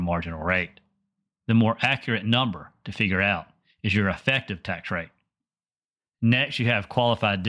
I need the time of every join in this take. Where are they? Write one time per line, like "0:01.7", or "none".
none